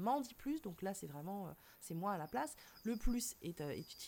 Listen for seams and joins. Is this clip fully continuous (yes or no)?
yes